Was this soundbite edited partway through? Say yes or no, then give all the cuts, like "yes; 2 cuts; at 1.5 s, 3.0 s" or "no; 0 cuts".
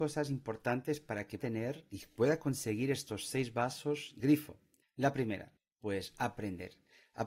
yes; 4 cuts; at 1.4 s, 4.2 s, 4.8 s, 5.6 s